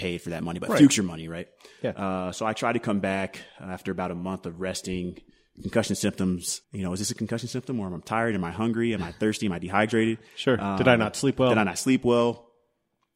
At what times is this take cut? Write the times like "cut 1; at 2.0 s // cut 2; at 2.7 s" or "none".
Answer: cut 1; at 6.6 s